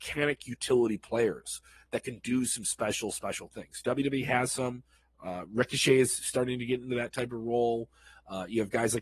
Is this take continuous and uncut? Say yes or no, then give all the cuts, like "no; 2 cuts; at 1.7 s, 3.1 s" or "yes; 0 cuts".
yes; 0 cuts